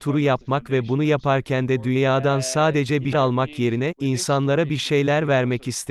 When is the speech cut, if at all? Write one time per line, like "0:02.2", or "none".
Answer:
0:03.1